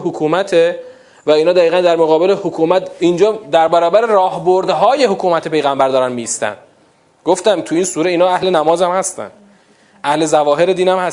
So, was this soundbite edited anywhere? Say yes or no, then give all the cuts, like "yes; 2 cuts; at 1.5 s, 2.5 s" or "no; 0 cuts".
no; 0 cuts